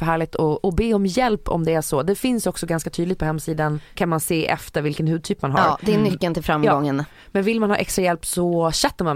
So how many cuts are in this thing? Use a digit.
0